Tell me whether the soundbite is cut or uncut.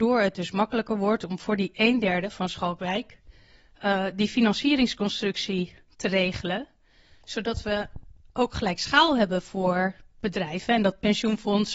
uncut